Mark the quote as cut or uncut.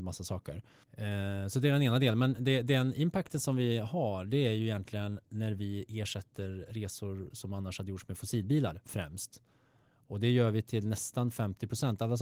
uncut